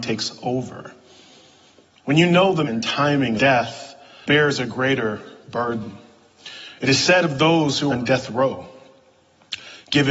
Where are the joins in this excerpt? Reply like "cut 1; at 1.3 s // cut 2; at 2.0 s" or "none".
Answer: cut 1; at 2.7 s // cut 2; at 3.4 s // cut 3; at 4.3 s // cut 4; at 7.9 s